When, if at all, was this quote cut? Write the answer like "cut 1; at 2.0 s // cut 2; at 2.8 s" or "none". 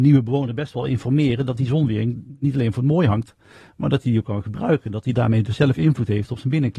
none